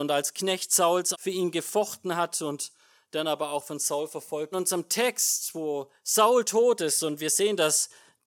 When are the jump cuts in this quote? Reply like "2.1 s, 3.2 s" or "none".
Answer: 1.1 s, 4.5 s